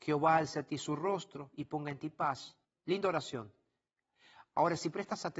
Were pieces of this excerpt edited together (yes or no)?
yes